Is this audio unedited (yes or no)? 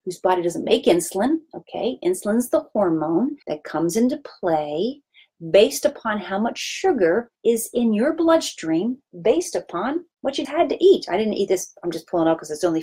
no